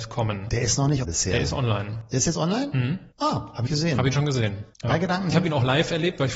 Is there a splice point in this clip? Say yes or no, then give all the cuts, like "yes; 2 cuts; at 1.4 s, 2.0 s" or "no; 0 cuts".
yes; 5 cuts; at 1.0 s, 3.1 s, 3.7 s, 4.7 s, 5.3 s